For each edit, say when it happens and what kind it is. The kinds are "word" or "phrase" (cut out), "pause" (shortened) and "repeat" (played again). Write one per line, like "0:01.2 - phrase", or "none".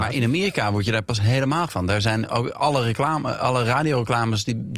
0:01.7 - word